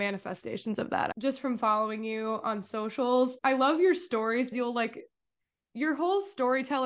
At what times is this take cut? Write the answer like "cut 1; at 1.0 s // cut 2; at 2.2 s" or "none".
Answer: cut 1; at 4.5 s

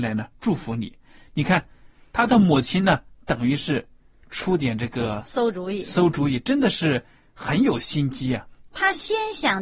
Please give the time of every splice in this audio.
none

